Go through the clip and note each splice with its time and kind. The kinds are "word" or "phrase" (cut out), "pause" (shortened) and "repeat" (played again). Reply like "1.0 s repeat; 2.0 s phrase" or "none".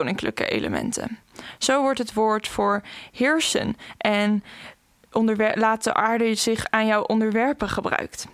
none